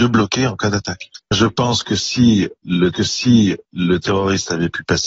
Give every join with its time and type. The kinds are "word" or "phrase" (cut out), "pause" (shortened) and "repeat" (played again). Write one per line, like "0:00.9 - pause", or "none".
0:02.9 - repeat